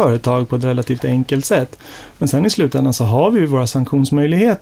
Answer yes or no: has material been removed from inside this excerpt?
no